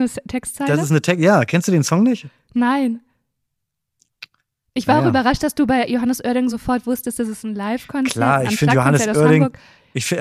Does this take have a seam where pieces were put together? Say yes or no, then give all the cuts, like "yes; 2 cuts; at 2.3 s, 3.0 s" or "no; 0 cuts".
no; 0 cuts